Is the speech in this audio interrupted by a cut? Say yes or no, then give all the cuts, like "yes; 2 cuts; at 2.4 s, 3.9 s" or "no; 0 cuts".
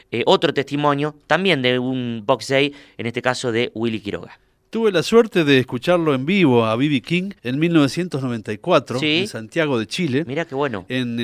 yes; 1 cut; at 7.4 s